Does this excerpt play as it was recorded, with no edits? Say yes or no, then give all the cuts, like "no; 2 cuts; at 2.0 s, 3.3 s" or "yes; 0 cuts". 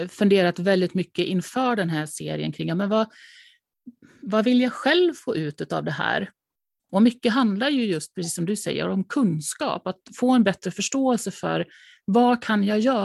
yes; 0 cuts